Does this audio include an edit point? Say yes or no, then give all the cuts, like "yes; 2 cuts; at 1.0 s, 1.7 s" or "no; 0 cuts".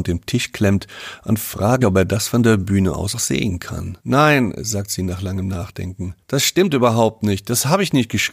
yes; 4 cuts; at 1.8 s, 3.1 s, 4.0 s, 6.2 s